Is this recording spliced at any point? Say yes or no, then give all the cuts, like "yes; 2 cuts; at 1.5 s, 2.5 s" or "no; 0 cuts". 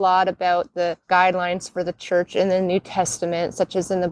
yes; 1 cut; at 1.0 s